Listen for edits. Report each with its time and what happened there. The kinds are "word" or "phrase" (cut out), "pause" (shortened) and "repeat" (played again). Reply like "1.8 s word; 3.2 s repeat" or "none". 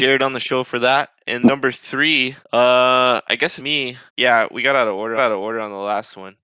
1.4 s word; 2.4 s pause; 3.6 s word; 4.1 s pause; 5.2 s repeat